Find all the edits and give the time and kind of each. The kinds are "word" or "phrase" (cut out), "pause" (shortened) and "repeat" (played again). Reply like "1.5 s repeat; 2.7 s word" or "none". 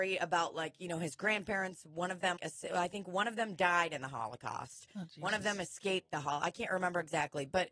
2.4 s word